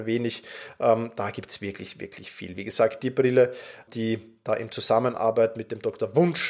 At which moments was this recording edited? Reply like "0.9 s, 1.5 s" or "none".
3.9 s